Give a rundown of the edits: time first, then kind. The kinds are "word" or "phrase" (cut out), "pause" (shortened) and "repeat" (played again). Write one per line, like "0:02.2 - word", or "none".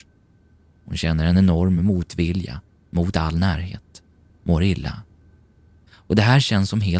none